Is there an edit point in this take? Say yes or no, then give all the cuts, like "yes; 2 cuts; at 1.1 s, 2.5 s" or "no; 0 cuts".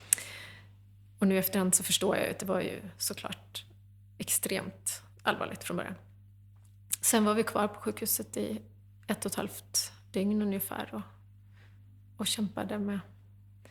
no; 0 cuts